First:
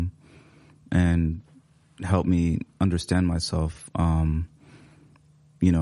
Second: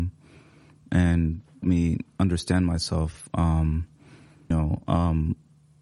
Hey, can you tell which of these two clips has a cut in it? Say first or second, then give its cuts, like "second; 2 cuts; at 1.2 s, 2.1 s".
second; 2 cuts; at 1.6 s, 4.5 s